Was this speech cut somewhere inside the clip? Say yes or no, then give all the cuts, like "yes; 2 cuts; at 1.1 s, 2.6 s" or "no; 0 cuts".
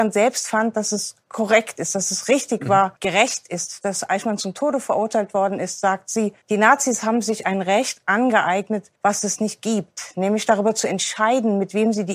yes; 3 cuts; at 3.0 s, 6.4 s, 9.0 s